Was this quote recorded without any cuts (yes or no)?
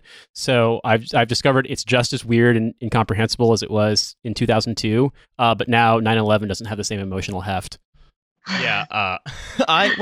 yes